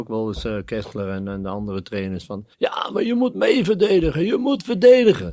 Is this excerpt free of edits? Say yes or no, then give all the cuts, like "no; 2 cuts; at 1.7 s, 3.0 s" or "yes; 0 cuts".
no; 1 cut; at 2.5 s